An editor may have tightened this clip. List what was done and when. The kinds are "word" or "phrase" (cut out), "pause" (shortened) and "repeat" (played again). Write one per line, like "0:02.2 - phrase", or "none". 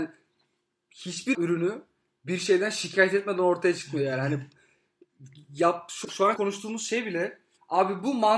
0:01.3 - word
0:06.0 - word
0:06.4 - word